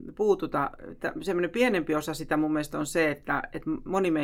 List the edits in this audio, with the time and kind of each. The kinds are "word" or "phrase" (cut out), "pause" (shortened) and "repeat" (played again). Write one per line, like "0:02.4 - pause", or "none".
none